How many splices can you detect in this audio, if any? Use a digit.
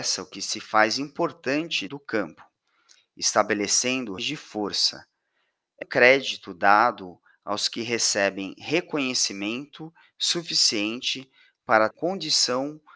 4